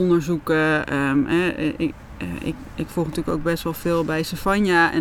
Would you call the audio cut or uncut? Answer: uncut